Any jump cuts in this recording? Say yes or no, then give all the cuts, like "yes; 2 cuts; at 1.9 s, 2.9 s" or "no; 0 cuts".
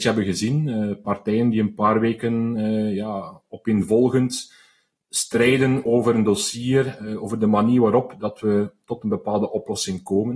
no; 0 cuts